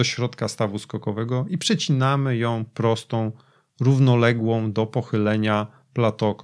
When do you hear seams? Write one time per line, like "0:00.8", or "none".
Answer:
none